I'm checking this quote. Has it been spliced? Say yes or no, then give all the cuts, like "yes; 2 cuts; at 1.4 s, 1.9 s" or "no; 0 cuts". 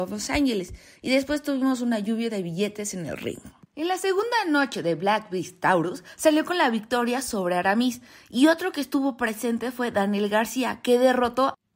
no; 0 cuts